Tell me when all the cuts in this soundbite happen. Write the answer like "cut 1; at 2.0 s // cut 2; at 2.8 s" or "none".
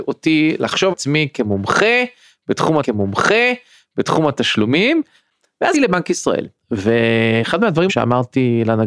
cut 1; at 0.9 s // cut 2; at 2.8 s // cut 3; at 5.7 s // cut 4; at 6.6 s // cut 5; at 7.9 s